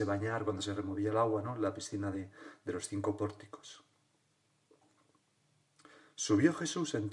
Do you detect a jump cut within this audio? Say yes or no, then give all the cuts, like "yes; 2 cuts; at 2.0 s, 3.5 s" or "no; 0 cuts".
no; 0 cuts